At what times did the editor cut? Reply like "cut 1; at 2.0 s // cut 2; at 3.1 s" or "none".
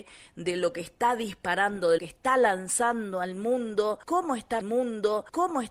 cut 1; at 2.0 s // cut 2; at 4.6 s